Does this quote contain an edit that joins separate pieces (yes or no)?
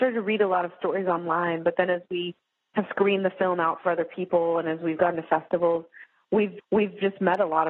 yes